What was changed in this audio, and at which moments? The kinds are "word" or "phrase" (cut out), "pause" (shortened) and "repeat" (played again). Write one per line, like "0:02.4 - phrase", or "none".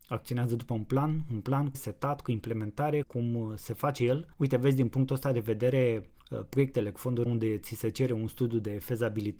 0:01.7 - word
0:03.0 - word
0:04.3 - pause
0:06.2 - pause
0:07.3 - phrase

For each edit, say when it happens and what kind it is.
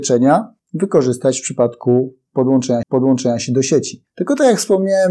0:02.8 - repeat

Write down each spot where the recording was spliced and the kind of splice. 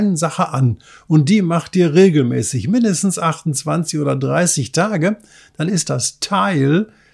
none

